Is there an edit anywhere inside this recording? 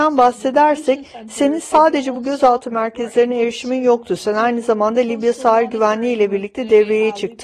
no; 0 cuts

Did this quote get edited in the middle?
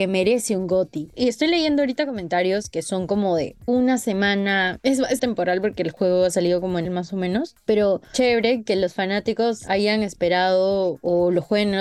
yes; 3 cuts; at 3.7 s, 5.2 s, 6.8 s

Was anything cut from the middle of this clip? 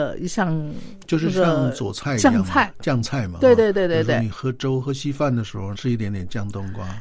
yes; 1 cut; at 5.7 s

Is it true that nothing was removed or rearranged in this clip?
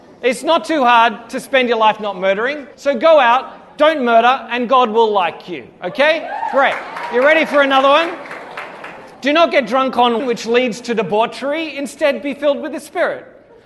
no; 3 cuts; at 2.7 s, 9.1 s, 10.2 s

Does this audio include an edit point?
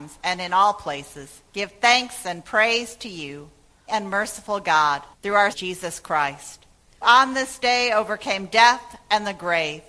yes; 5 cuts; at 1.5 s, 3.9 s, 5.1 s, 5.5 s, 7.0 s

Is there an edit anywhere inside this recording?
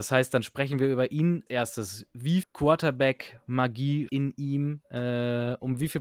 yes; 3 cuts; at 1.5 s, 2.4 s, 4.1 s

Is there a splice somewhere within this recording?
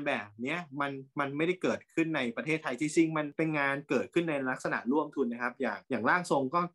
yes; 1 cut; at 5.8 s

